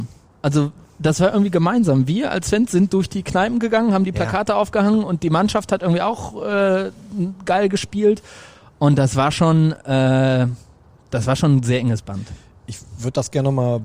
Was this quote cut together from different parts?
no; 0 cuts

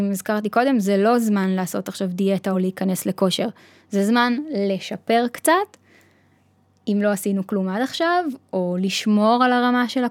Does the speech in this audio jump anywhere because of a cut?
no; 0 cuts

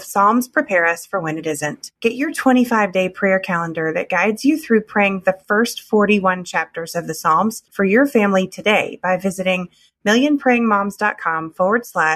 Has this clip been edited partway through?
yes; 2 cuts; at 2.0 s, 7.7 s

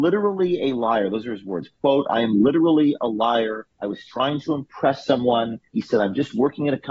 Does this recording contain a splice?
yes; 2 cuts; at 3.7 s, 5.7 s

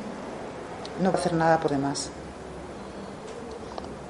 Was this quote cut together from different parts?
yes; 2 cuts; at 1.1 s, 1.7 s

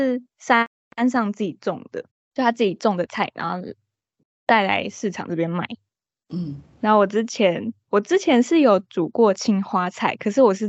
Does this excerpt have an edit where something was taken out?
yes; 1 cut; at 2.1 s

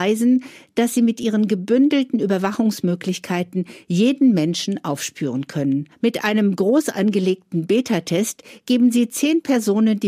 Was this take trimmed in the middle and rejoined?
yes; 1 cut; at 5.9 s

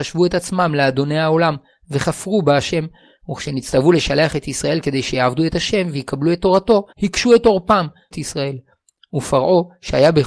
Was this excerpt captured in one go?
no; 2 cuts; at 6.9 s, 8.1 s

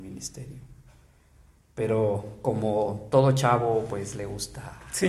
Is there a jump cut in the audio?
no; 0 cuts

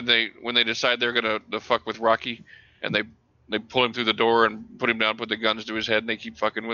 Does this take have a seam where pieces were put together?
no; 0 cuts

